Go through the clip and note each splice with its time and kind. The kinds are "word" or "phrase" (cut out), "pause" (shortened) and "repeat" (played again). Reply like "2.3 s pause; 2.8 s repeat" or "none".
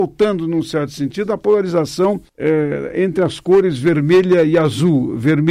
2.3 s pause

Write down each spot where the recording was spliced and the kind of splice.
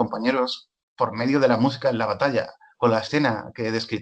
none

